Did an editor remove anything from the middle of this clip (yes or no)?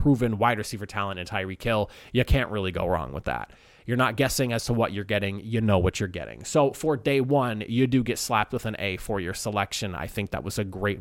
no